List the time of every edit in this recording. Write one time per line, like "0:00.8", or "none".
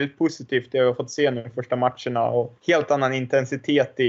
0:02.6